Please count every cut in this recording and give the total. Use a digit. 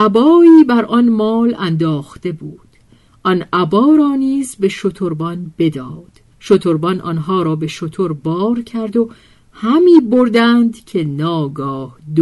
1